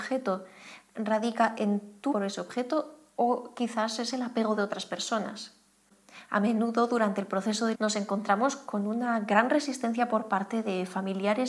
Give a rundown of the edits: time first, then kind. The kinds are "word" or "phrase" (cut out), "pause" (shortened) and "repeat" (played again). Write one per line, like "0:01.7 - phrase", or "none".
0:02.1 - word
0:07.7 - word